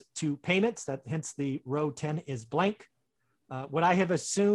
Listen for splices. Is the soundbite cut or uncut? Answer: uncut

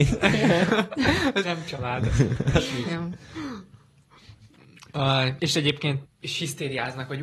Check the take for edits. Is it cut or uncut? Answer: cut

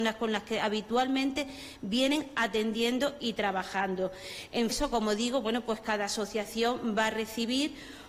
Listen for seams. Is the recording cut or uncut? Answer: cut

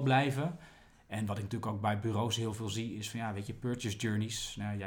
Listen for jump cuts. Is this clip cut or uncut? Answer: uncut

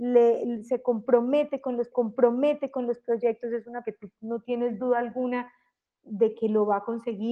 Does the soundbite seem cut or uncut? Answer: cut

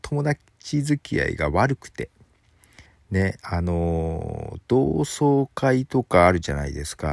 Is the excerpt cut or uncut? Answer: cut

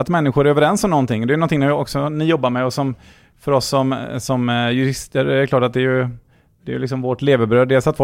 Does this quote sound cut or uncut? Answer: uncut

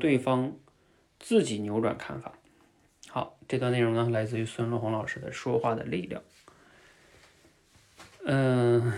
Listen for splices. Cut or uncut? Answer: uncut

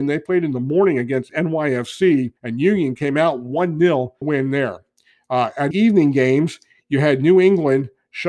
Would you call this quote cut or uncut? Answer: cut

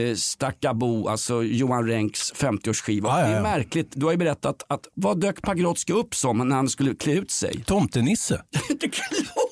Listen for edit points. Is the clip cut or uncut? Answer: uncut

